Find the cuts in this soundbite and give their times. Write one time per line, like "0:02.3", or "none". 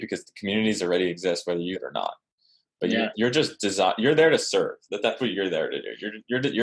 0:01.7
0:03.1
0:05.2